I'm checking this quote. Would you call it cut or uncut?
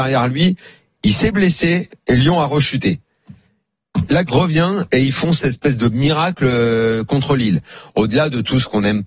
cut